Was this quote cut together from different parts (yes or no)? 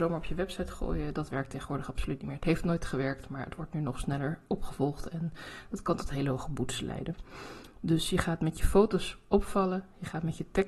no